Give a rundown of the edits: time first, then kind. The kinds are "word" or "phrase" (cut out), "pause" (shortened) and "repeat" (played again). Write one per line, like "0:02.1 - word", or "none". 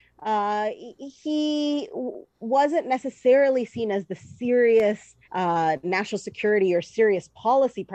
0:02.3 - pause
0:05.2 - pause